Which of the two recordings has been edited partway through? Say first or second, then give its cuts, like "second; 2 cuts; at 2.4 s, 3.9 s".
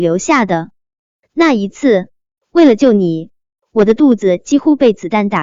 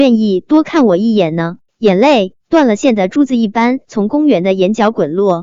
second; 2 cuts; at 1.6 s, 2.4 s